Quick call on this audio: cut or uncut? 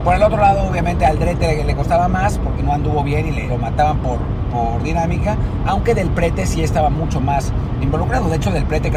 cut